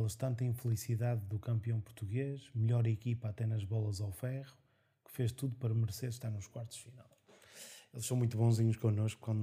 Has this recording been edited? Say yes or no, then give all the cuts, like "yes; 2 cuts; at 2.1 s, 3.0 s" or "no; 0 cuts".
no; 0 cuts